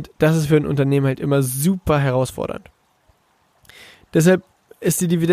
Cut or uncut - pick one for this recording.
uncut